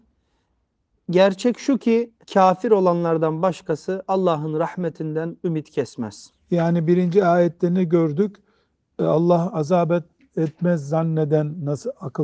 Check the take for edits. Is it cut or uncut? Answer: cut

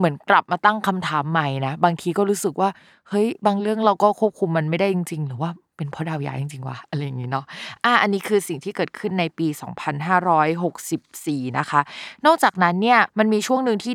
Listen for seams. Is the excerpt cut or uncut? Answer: uncut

